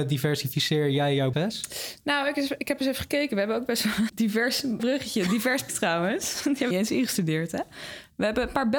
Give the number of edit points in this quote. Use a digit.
5